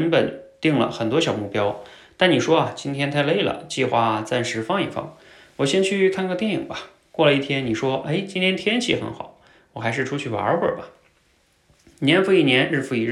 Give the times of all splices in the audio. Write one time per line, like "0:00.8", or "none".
none